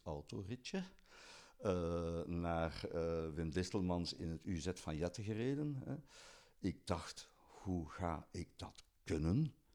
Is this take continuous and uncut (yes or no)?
yes